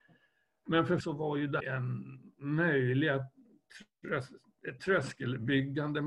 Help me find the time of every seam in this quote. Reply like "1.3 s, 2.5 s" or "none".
1.0 s, 1.6 s, 4.8 s